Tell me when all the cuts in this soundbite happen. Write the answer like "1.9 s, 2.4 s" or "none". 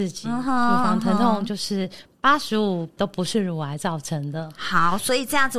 3.0 s